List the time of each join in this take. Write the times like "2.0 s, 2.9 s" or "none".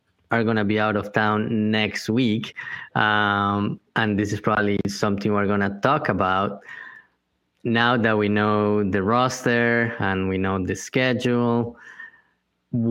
3.9 s